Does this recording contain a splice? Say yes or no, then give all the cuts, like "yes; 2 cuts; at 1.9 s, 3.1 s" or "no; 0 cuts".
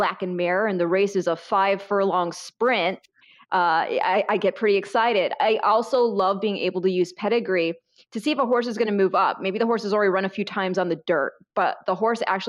no; 0 cuts